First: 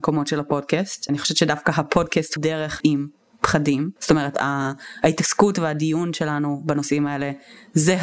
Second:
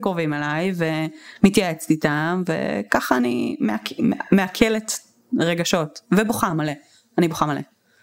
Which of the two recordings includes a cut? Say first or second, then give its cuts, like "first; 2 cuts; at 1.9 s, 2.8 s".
first; 4 cuts; at 1.1 s, 2.4 s, 2.8 s, 4.0 s